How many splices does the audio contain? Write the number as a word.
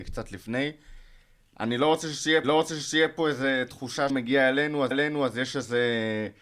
three